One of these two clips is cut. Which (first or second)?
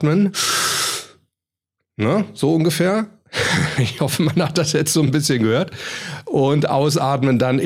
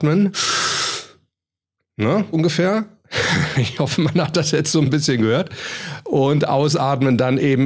second